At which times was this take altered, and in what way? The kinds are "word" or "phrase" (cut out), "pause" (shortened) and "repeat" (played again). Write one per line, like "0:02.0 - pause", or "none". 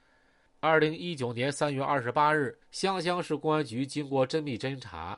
0:02.6 - pause